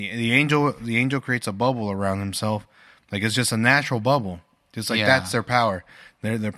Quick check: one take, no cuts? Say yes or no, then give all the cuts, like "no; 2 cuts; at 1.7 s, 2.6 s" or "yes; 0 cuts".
yes; 0 cuts